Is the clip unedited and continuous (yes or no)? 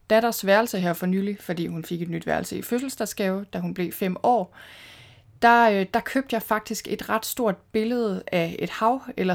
yes